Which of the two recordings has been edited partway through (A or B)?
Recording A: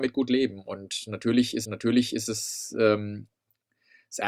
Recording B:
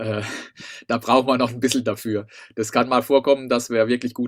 A